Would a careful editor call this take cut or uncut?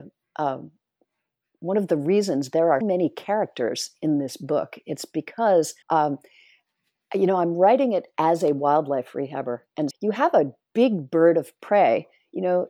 cut